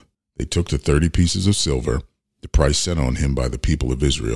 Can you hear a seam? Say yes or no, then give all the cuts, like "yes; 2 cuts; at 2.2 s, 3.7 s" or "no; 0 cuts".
no; 0 cuts